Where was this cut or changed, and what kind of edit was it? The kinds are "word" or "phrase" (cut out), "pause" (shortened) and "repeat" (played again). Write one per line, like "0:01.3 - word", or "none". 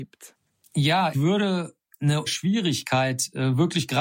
0:01.1 - word
0:02.3 - word